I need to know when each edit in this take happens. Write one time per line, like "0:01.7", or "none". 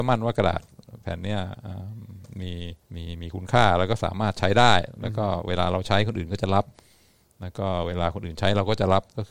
0:02.8